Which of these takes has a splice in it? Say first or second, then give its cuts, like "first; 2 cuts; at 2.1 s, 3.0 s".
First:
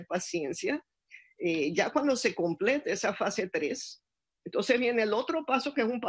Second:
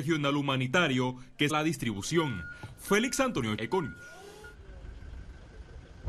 second; 2 cuts; at 1.5 s, 3.6 s